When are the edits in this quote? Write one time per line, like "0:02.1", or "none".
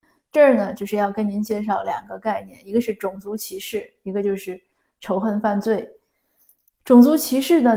none